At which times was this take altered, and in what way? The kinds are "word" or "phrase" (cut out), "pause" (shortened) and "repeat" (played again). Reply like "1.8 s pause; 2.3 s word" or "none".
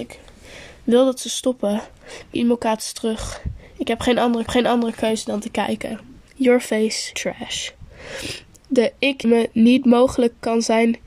2.3 s word; 4.5 s repeat; 6.3 s pause; 7.1 s word; 9.2 s word